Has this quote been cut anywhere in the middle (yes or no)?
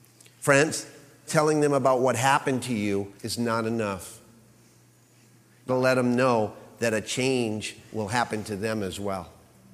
yes